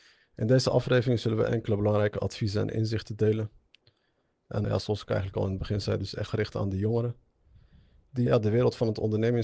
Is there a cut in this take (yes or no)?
yes